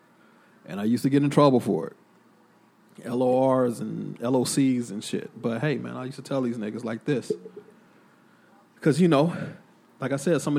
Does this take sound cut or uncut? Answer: uncut